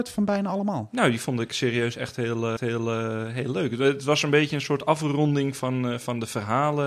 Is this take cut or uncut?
cut